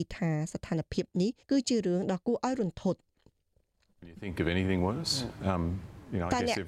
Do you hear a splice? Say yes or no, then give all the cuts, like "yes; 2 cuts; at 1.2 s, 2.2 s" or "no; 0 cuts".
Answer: yes; 1 cut; at 1.4 s